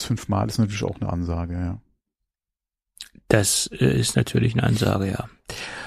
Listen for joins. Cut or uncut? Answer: uncut